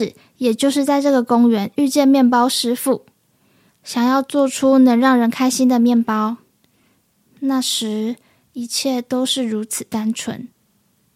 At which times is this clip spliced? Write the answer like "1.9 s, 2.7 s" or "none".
none